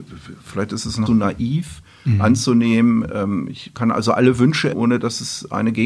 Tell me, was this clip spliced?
yes; 3 cuts; at 1.1 s, 3.7 s, 4.7 s

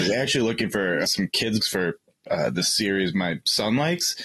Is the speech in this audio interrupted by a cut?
yes; 2 cuts; at 1.0 s, 1.6 s

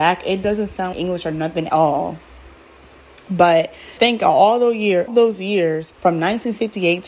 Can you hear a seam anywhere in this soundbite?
yes; 5 cuts; at 0.9 s, 1.7 s, 4.0 s, 5.1 s, 5.9 s

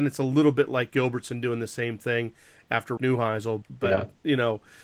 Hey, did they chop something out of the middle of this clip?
yes; 3 cuts; at 0.9 s, 3.0 s, 3.6 s

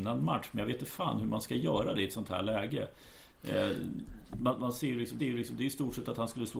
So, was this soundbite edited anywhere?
yes; 1 cut; at 5.2 s

